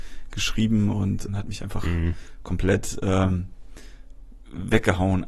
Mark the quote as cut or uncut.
cut